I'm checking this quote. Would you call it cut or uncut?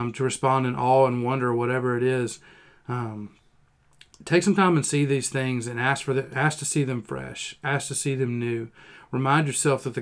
uncut